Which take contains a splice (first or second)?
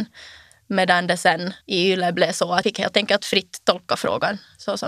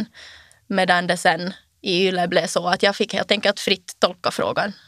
first